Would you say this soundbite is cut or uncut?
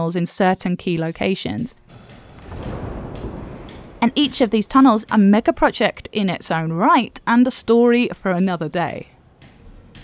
cut